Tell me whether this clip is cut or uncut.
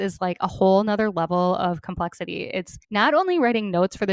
cut